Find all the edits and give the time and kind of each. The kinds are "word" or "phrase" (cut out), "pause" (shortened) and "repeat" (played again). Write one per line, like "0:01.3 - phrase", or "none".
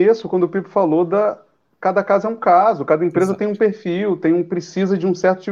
none